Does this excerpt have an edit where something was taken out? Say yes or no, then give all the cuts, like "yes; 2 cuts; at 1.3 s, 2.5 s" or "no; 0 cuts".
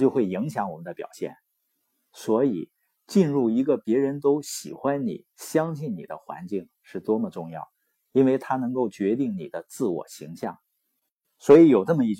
no; 0 cuts